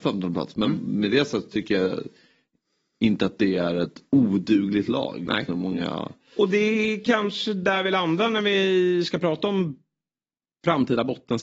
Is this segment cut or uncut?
uncut